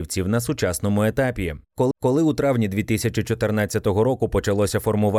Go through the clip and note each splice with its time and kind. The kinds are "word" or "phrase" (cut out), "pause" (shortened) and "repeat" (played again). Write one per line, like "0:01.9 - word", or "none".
0:01.9 - repeat